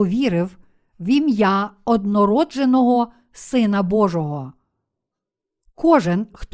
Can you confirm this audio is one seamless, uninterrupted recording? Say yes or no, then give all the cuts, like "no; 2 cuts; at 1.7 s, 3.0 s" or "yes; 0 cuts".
yes; 0 cuts